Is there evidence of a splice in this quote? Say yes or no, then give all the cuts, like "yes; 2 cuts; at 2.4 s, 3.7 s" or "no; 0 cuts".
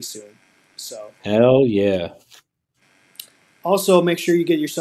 no; 0 cuts